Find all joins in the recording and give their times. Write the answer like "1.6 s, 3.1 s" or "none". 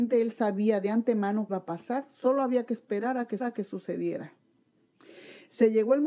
1.5 s, 3.4 s